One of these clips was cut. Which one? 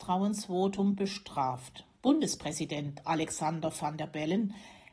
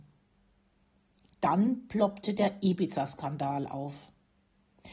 first; 1 cut; at 1.9 s

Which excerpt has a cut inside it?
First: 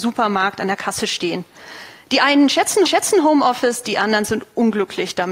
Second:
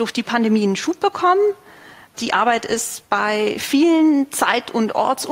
first; 1 cut; at 2.9 s

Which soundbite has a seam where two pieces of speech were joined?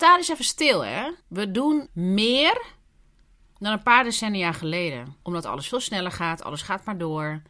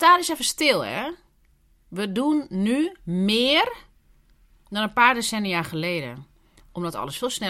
first; 3 cuts; at 1.2 s, 1.9 s, 5.2 s

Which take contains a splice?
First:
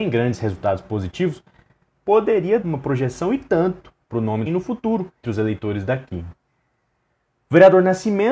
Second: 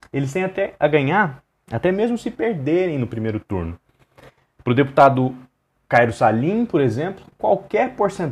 first; 3 cuts; at 2.6 s, 4.5 s, 5.2 s

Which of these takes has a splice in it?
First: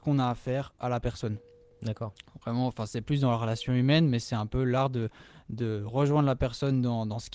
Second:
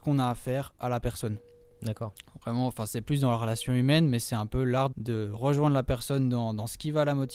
second; 1 cut; at 4.9 s

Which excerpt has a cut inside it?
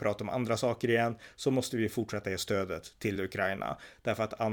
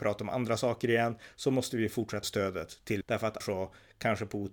second; 3 cuts; at 2.2 s, 3.0 s, 3.4 s

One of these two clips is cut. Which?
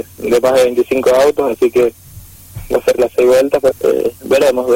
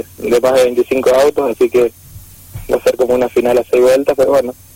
first; 2 cuts; at 3.0 s, 3.7 s

